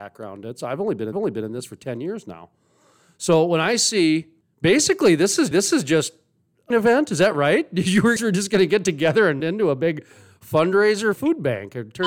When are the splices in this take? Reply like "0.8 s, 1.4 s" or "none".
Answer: 1.1 s, 4.4 s, 5.5 s, 6.7 s, 8.2 s, 9.4 s, 11.2 s